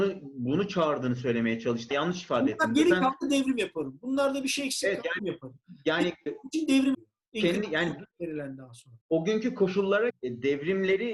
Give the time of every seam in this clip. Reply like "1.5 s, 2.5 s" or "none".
1.9 s, 5.2 s, 6.3 s, 6.9 s, 8.1 s, 9.0 s, 10.1 s